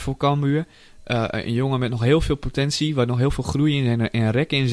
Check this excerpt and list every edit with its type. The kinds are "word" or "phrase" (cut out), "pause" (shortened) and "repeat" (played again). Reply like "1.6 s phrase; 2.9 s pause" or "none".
none